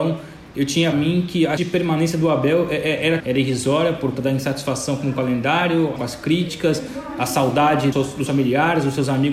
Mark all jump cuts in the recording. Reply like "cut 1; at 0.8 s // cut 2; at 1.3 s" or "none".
cut 1; at 0.9 s // cut 2; at 1.6 s // cut 3; at 3.2 s // cut 4; at 4.2 s // cut 5; at 6.0 s // cut 6; at 7.9 s // cut 7; at 8.3 s